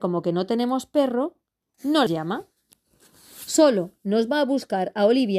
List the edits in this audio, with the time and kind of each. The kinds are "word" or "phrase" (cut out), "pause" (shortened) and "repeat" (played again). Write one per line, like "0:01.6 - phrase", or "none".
0:02.1 - word